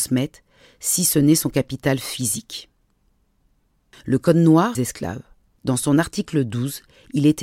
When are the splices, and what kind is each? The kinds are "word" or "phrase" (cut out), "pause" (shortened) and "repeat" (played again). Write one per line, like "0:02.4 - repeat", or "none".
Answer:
0:04.7 - phrase